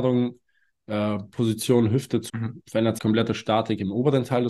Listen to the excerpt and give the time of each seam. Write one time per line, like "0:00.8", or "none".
0:02.3
0:03.0